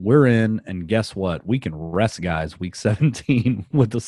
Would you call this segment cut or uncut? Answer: uncut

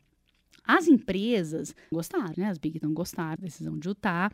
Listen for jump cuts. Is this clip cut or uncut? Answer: cut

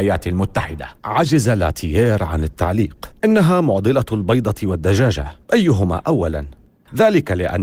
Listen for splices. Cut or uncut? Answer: cut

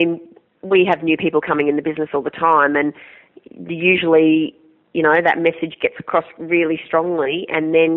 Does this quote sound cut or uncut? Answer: uncut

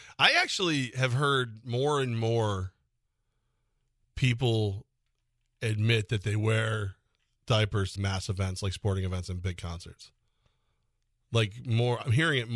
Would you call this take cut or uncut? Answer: cut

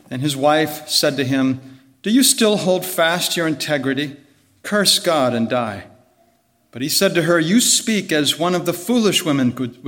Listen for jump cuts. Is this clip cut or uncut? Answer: uncut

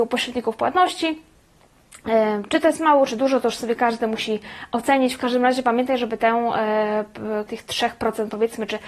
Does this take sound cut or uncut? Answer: cut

